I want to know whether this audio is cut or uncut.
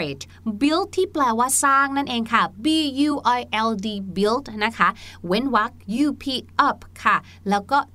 uncut